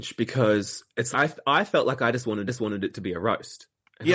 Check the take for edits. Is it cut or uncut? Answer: cut